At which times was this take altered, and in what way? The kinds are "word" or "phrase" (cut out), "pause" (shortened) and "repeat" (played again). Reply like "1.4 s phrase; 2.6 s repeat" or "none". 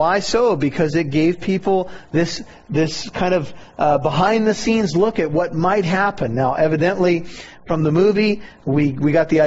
none